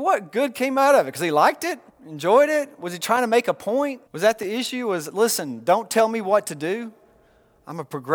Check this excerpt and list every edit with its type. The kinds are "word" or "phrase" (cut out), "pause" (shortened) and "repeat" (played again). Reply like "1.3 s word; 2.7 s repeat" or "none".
1.9 s pause; 4.1 s pause